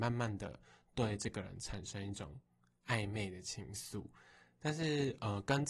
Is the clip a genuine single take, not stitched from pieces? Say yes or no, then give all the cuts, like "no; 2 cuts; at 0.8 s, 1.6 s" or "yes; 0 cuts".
yes; 0 cuts